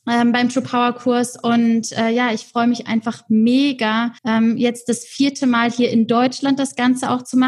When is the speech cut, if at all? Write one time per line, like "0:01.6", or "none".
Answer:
0:04.2